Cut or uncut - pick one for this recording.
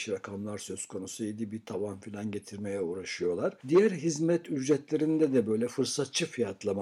uncut